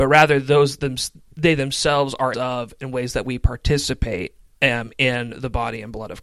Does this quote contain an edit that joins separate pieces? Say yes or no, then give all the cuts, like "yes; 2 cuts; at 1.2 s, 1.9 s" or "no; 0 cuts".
yes; 1 cut; at 2.3 s